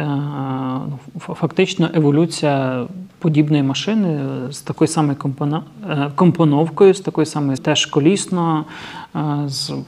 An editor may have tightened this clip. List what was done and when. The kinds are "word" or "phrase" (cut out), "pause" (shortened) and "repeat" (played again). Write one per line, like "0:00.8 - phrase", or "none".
0:07.6 - word